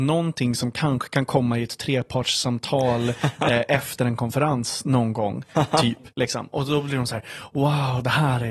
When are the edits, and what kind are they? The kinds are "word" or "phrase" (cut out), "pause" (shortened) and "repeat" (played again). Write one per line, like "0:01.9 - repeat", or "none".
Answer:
0:06.1 - pause